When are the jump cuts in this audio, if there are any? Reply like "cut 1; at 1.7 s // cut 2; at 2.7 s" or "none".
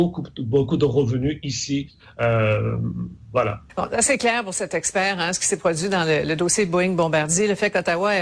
cut 1; at 3.7 s